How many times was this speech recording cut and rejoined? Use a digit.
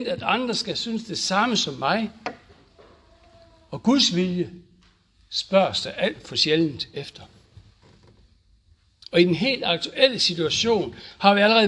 0